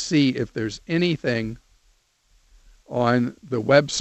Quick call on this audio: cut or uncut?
uncut